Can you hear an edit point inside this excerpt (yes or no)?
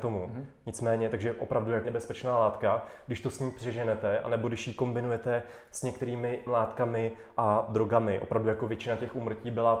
yes